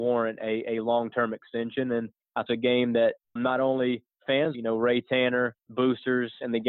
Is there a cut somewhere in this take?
yes; 4 cuts; at 2.5 s, 3.4 s, 4.5 s, 5.6 s

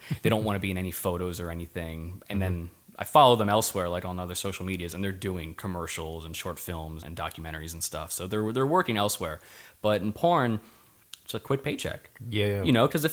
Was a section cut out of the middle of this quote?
yes; 1 cut; at 7.0 s

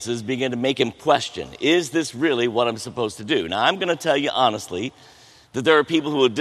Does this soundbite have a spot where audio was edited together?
no; 0 cuts

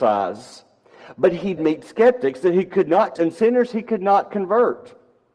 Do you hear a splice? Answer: yes; 2 cuts; at 1.6 s, 3.2 s

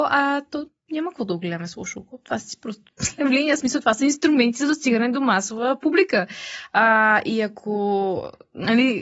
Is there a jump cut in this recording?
no; 0 cuts

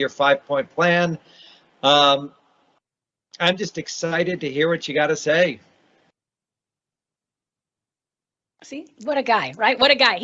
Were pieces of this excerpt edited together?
no; 0 cuts

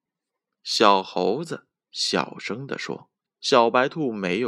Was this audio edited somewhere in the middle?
yes; 1 cut; at 3.2 s

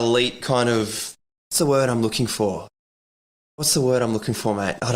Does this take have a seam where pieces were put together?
no; 0 cuts

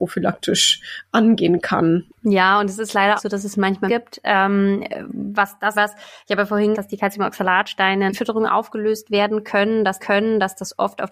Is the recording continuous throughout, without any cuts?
no; 6 cuts; at 3.2 s, 3.9 s, 5.7 s, 6.7 s, 8.1 s, 10.0 s

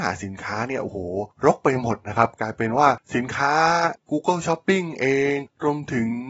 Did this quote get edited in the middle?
no; 0 cuts

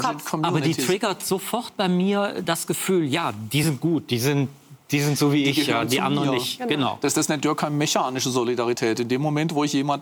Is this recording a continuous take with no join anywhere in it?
yes; 0 cuts

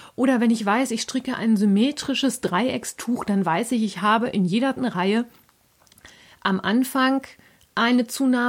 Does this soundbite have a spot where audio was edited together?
yes; 1 cut; at 4.8 s

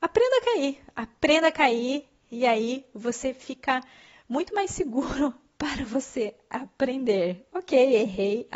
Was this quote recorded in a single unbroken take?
yes; 0 cuts

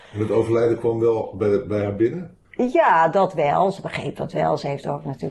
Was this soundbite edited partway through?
yes; 1 cut; at 2.4 s

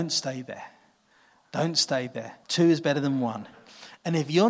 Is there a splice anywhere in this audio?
yes; 1 cut; at 2.4 s

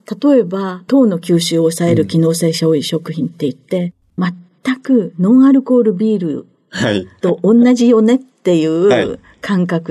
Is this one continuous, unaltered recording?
no; 1 cut; at 4.2 s

